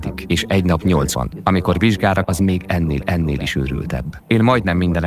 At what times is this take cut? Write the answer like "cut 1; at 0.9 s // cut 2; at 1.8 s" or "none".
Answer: cut 1; at 1.1 s // cut 2; at 2.2 s // cut 3; at 3.0 s